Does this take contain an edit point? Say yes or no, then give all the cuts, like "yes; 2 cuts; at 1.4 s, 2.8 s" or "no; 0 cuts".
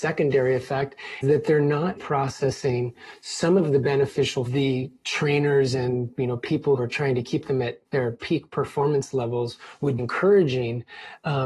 yes; 6 cuts; at 1.2 s, 2.0 s, 4.5 s, 6.8 s, 7.9 s, 10.0 s